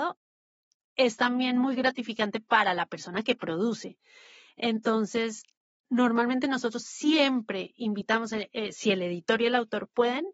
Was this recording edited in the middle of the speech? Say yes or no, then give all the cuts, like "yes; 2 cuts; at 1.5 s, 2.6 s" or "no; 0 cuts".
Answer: no; 0 cuts